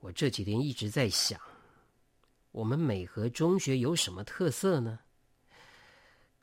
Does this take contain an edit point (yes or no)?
no